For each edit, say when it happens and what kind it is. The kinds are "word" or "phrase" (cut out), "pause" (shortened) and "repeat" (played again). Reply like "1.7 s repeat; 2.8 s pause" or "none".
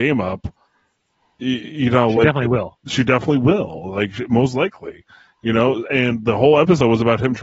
none